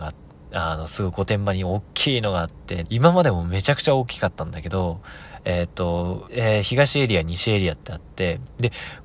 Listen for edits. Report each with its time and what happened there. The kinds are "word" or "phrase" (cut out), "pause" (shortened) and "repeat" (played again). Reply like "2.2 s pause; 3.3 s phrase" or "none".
2.8 s word; 6.3 s word